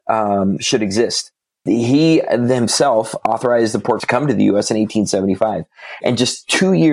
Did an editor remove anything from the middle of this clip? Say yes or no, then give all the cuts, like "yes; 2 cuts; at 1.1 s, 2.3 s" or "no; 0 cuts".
yes; 1 cut; at 4.0 s